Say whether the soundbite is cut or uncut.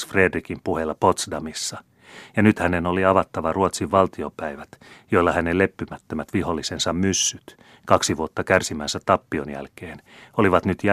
uncut